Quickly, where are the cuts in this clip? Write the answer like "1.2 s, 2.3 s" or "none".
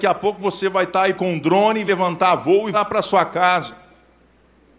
1.2 s, 1.9 s, 2.7 s